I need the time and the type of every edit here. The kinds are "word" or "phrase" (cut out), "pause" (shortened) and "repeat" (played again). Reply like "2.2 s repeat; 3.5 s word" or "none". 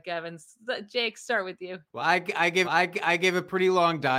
1.9 s pause; 2.6 s repeat